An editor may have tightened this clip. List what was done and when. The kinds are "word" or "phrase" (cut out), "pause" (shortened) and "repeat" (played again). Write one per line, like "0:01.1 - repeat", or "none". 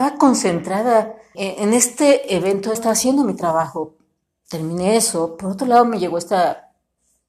0:01.3 - word
0:02.7 - phrase